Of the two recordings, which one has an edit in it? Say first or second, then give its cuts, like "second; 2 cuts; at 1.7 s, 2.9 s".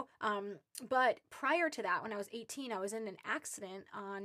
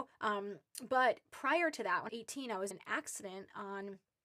second; 2 cuts; at 2.1 s, 2.7 s